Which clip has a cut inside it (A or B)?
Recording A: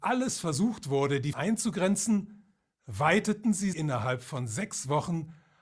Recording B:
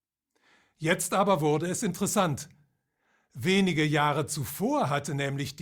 A